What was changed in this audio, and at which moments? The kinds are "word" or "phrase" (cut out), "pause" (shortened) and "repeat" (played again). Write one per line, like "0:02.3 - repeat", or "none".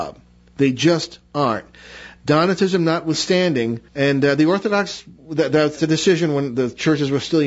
0:03.9 - pause
0:05.2 - pause
0:05.8 - word